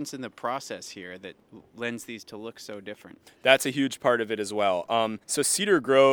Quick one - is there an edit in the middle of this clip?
yes; 1 cut; at 5.2 s

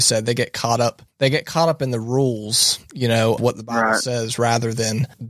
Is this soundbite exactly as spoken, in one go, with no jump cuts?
no; 1 cut; at 3.4 s

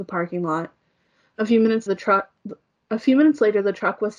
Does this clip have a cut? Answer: yes; 1 cut; at 1.9 s

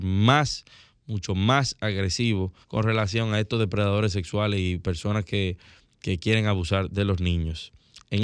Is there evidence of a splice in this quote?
yes; 1 cut; at 2.6 s

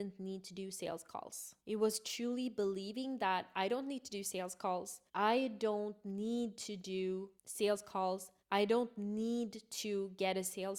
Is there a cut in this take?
yes; 4 cuts; at 1.6 s, 5.1 s, 7.4 s, 8.4 s

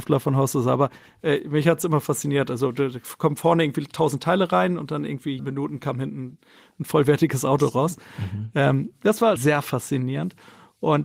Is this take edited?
yes; 2 cuts; at 5.4 s, 9.4 s

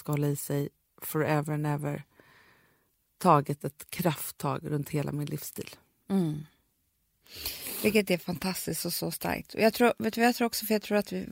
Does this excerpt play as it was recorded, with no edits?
yes; 0 cuts

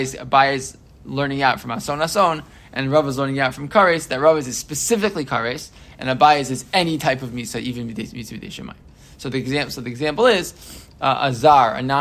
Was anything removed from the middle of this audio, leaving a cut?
no; 0 cuts

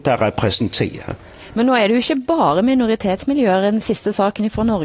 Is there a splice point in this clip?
no; 0 cuts

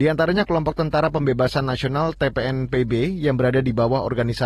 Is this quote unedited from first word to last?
yes; 0 cuts

